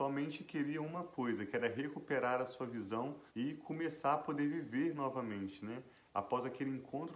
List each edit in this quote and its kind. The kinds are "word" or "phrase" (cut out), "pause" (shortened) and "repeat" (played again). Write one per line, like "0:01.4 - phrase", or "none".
0:03.3 - pause